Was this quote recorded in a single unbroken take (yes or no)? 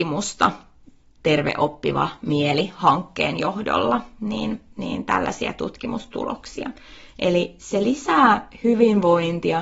yes